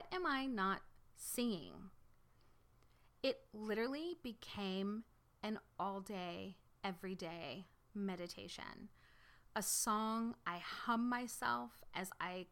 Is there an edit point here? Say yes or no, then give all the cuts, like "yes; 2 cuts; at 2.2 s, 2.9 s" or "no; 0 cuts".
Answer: no; 0 cuts